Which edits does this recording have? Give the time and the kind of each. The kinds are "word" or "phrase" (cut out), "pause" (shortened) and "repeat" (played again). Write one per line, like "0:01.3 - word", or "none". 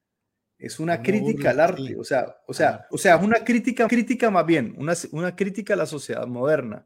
0:02.9 - word
0:03.9 - repeat